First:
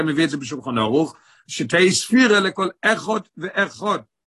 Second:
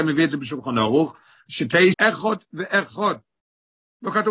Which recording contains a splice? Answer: second; 1 cut; at 1.9 s

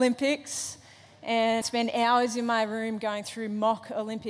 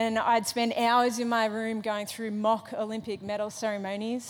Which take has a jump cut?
first; 1 cut; at 1.6 s

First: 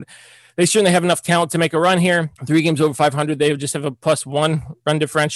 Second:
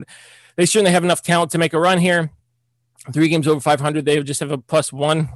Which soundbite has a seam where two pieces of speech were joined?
first; 1 cut; at 2.4 s

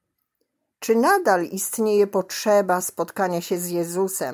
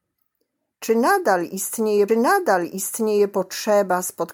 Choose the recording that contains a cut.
second; 1 cut; at 2.1 s

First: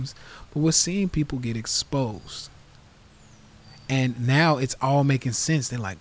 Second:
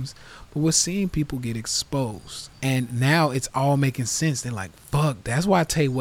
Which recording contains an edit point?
second; 1 cut; at 2.5 s

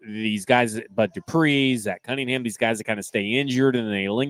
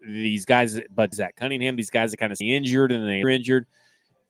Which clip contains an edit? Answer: second; 3 cuts; at 1.1 s, 2.4 s, 3.2 s

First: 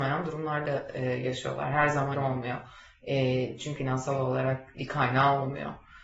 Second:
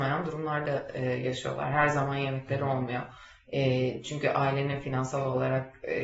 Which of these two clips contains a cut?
first; 3 cuts; at 2.1 s, 3.8 s, 4.7 s

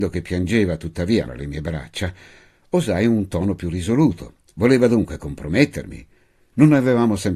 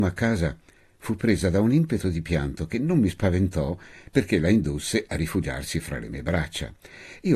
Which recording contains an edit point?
first; 1 cut; at 1.3 s

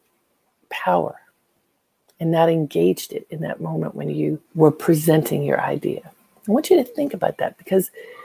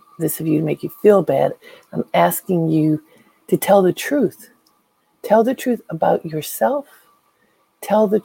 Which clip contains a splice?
first; 1 cut; at 4.4 s

